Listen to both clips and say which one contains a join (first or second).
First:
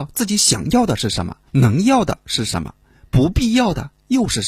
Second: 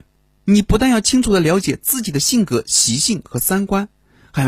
first